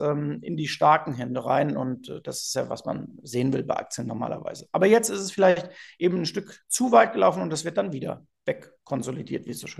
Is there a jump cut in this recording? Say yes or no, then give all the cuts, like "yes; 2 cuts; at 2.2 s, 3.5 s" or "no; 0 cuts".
no; 0 cuts